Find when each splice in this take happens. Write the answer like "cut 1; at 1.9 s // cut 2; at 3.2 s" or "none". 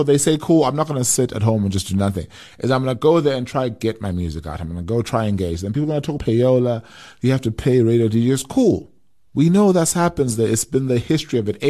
cut 1; at 6.2 s